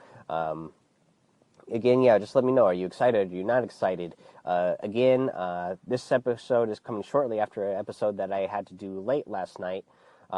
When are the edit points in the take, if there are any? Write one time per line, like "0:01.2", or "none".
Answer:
none